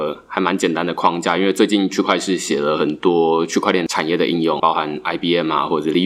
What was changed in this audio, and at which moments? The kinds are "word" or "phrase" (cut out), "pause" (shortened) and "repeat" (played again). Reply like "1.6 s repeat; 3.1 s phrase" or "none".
none